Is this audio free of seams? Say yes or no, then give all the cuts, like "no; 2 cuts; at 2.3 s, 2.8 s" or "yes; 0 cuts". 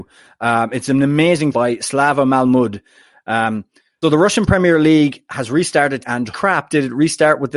no; 4 cuts; at 1.5 s, 4.0 s, 6.0 s, 6.3 s